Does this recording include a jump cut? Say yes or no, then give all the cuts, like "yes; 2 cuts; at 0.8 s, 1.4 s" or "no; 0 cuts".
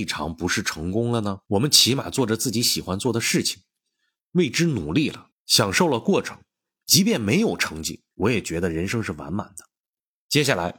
yes; 2 cuts; at 1.4 s, 8.1 s